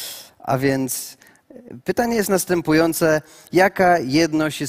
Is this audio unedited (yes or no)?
yes